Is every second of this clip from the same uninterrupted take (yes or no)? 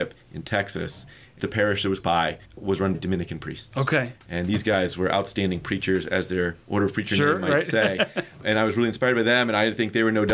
no